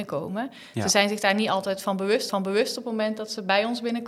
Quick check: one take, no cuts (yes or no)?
no